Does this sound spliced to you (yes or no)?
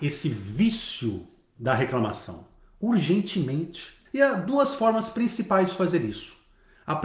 yes